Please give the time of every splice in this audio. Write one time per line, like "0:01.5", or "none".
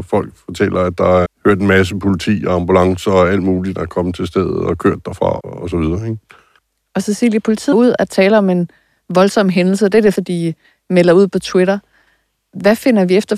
0:01.3
0:03.8
0:05.4
0:07.7
0:08.1
0:10.2